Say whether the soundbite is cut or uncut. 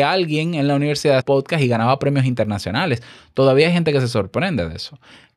cut